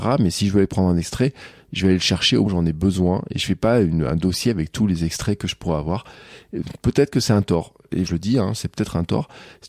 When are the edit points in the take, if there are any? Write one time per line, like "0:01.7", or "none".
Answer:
0:02.5
0:08.1